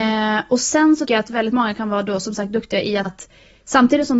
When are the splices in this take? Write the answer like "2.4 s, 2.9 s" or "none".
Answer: 1.1 s, 3.1 s